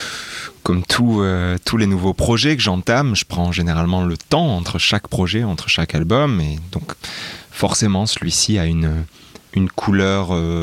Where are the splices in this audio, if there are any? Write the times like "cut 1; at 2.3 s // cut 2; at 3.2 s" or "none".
cut 1; at 9.5 s